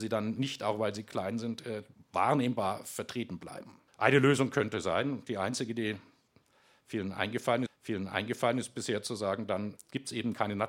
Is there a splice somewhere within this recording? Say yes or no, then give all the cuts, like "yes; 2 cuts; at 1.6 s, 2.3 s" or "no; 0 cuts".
yes; 4 cuts; at 1.9 s, 3.9 s, 7.7 s, 9.8 s